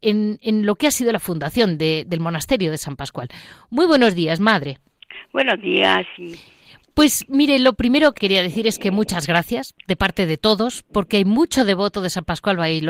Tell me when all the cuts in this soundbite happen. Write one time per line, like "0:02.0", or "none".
0:08.2